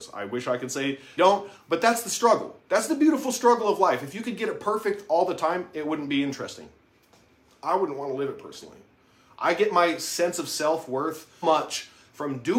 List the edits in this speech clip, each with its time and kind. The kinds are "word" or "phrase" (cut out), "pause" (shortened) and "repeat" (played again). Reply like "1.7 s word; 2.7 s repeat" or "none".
1.2 s phrase; 11.4 s word